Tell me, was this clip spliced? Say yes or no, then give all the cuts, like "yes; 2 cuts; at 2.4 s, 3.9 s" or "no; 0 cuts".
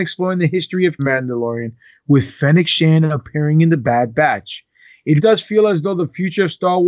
yes; 2 cuts; at 1.0 s, 5.2 s